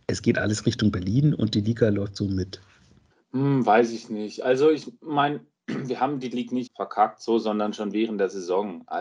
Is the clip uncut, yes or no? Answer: no